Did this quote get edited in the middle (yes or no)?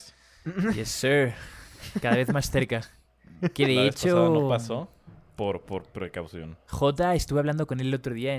no